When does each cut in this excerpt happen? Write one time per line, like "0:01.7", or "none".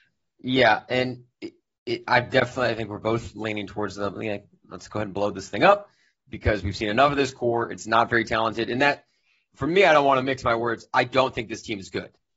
none